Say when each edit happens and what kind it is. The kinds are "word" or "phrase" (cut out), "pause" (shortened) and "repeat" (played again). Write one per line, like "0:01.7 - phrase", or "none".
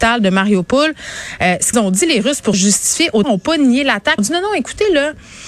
0:01.7 - word
0:02.5 - word
0:03.2 - word
0:04.2 - word